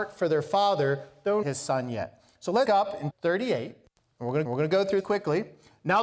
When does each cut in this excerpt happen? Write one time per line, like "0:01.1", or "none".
0:01.4
0:02.7
0:03.1
0:03.9
0:04.4
0:05.0

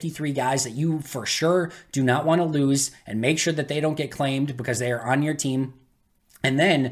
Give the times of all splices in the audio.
none

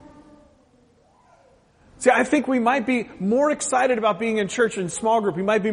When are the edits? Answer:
none

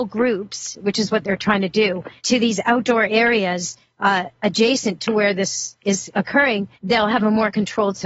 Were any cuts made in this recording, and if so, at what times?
0:02.2
0:06.7

